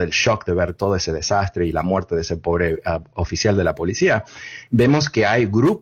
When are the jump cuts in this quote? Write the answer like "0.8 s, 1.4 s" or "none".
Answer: none

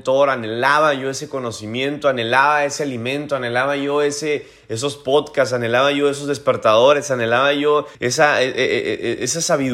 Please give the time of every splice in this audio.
7.9 s

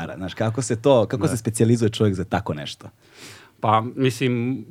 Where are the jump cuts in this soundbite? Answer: none

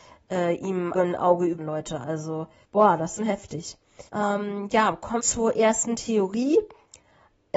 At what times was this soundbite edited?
0.9 s, 1.6 s, 2.6 s, 3.2 s, 4.1 s, 5.2 s

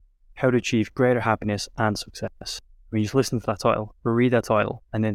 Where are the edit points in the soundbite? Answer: none

